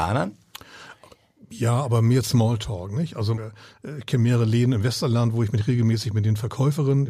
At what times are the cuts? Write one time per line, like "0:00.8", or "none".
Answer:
0:03.4